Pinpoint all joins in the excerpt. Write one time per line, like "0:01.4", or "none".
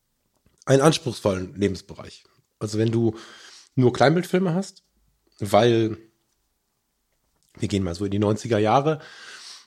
none